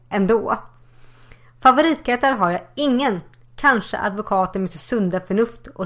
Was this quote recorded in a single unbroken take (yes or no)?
yes